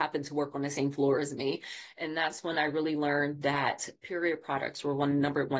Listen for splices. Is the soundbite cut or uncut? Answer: uncut